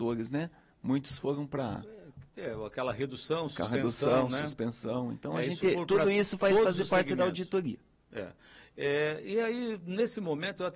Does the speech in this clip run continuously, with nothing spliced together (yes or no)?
yes